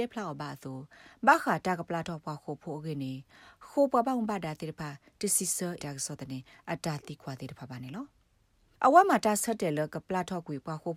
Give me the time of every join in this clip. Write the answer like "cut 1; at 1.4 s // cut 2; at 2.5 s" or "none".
cut 1; at 5.8 s